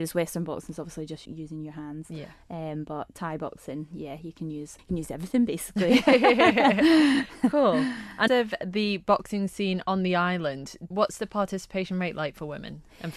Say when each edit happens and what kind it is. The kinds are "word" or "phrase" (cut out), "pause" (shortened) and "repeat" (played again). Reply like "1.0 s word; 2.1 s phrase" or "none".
1.3 s word; 4.8 s pause; 8.3 s phrase